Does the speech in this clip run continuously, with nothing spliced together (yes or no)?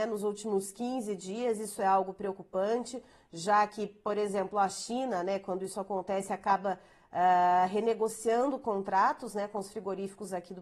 yes